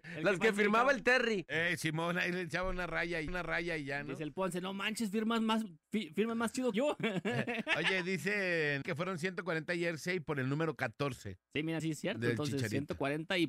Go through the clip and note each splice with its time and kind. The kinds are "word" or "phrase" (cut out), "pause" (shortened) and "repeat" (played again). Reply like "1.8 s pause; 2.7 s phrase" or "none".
3.3 s repeat; 4.3 s word; 6.7 s word; 8.8 s word; 11.8 s word